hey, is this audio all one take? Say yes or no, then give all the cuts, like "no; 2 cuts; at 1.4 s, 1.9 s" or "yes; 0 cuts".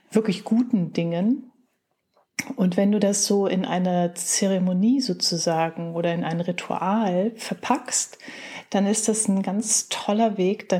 yes; 0 cuts